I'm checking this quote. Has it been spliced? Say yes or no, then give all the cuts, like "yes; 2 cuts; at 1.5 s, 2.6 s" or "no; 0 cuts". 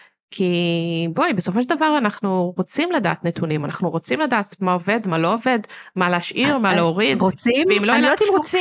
no; 0 cuts